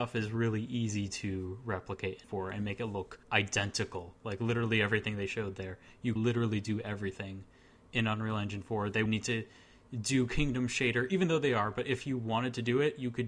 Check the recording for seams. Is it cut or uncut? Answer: cut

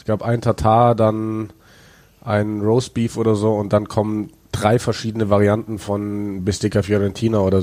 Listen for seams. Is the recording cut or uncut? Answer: uncut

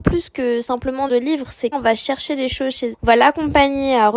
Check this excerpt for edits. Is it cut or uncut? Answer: cut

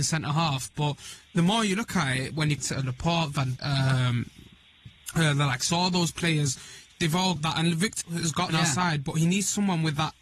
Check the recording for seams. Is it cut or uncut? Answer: cut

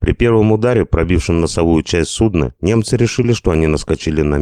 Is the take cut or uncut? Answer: uncut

